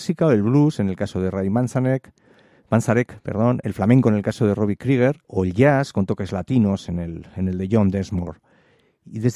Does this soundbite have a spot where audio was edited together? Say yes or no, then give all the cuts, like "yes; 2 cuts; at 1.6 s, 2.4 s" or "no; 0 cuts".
yes; 1 cut; at 5.2 s